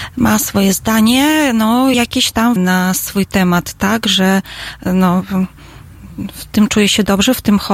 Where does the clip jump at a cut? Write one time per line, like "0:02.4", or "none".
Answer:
0:01.9
0:02.6